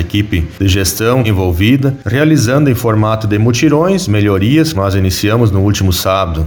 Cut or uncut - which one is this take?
cut